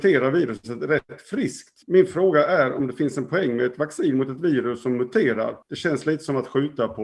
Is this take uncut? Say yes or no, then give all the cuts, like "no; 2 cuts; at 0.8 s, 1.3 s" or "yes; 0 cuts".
no; 2 cuts; at 1.8 s, 5.6 s